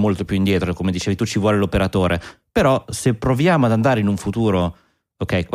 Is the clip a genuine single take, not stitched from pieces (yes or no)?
yes